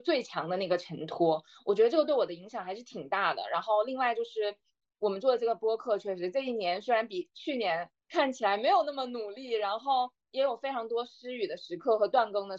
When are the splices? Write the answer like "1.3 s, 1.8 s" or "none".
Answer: none